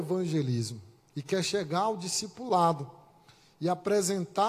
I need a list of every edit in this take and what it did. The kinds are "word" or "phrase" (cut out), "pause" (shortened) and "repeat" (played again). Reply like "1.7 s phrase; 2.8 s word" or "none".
none